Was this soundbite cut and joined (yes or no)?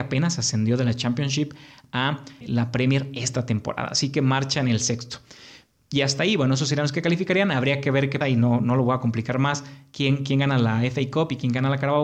yes